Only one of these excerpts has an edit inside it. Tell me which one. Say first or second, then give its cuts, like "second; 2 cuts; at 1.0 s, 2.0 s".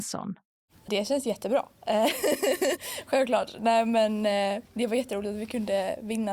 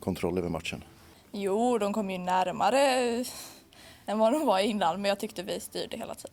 first; 1 cut; at 4.6 s